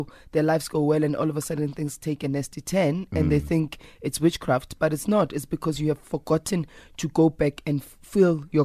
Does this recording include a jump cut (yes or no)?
no